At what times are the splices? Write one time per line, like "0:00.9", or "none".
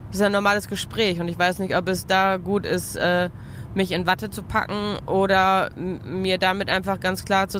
none